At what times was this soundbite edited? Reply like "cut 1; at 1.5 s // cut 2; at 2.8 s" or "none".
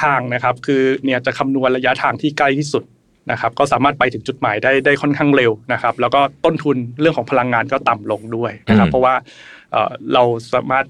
cut 1; at 1.0 s